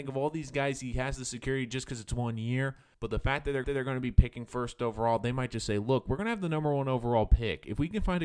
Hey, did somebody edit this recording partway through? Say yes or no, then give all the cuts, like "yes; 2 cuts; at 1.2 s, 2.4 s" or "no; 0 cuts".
yes; 2 cuts; at 2.9 s, 3.6 s